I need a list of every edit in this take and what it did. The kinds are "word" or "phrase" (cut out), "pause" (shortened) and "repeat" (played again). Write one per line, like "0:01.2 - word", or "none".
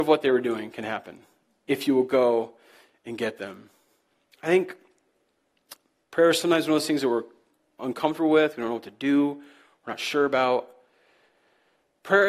none